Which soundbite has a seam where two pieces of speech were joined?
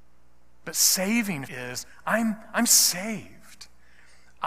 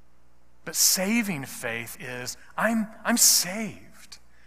first; 1 cut; at 1.5 s

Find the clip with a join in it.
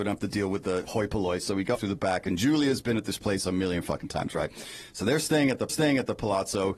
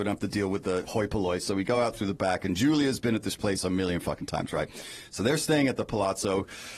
first; 2 cuts; at 1.7 s, 5.7 s

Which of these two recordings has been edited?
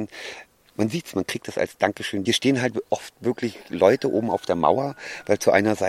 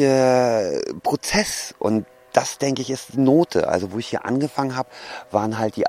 first; 1 cut; at 2.3 s

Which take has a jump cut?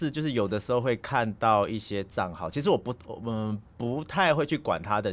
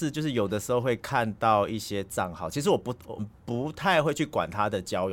second; 1 cut; at 3.2 s

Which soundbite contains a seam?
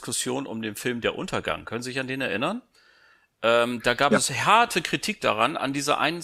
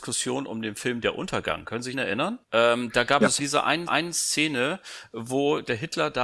second; 4 cuts; at 1.9 s, 2.4 s, 3.4 s, 3.9 s

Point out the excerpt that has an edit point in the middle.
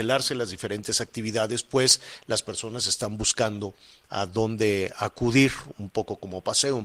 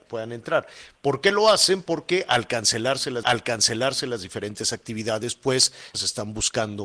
second; 2 cuts; at 3.2 s, 5.9 s

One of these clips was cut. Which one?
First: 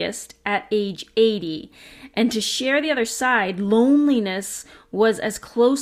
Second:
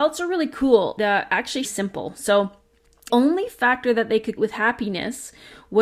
second; 4 cuts; at 1.0 s, 1.6 s, 3.1 s, 4.4 s

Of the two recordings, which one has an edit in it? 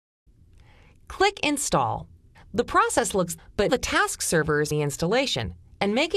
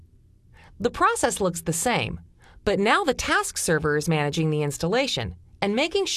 first; 4 cuts; at 2.3 s, 3.4 s, 3.7 s, 4.7 s

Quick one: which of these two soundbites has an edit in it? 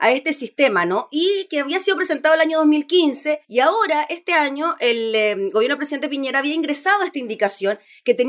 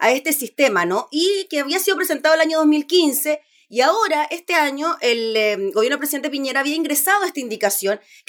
first; 1 cut; at 3.4 s

